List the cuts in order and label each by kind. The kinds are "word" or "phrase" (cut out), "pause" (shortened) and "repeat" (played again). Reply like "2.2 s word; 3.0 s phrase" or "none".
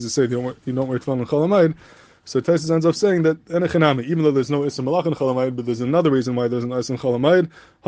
none